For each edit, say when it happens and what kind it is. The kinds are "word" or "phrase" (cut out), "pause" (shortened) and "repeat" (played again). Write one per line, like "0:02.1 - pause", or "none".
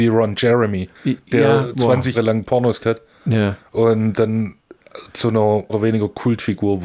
0:01.7 - word
0:02.1 - word
0:02.8 - word
0:04.1 - word
0:05.7 - word